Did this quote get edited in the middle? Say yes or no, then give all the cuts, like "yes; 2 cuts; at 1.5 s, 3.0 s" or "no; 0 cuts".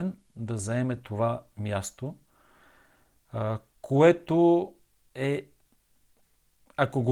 no; 0 cuts